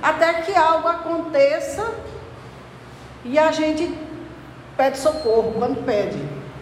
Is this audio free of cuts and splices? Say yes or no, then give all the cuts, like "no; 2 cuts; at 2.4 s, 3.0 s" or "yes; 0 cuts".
yes; 0 cuts